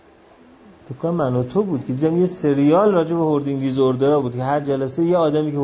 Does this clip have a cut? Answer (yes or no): no